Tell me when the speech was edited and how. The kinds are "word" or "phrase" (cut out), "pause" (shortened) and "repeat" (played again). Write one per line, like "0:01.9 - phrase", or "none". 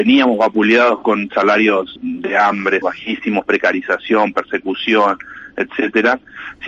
0:02.0 - word
0:02.8 - word